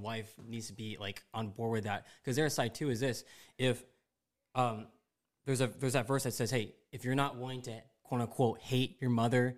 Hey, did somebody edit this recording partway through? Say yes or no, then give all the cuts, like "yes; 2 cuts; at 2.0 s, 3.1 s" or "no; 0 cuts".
no; 0 cuts